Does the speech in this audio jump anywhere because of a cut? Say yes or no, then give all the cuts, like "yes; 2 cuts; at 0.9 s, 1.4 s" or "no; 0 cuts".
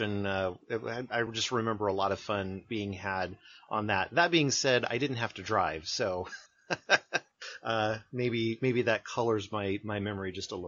no; 0 cuts